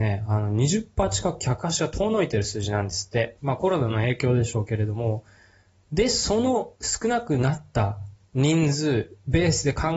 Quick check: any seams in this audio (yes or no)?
no